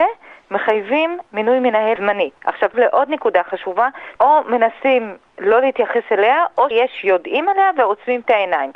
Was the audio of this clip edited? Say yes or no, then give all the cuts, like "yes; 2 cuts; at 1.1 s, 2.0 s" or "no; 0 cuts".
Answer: yes; 4 cuts; at 2.0 s, 2.7 s, 4.2 s, 6.7 s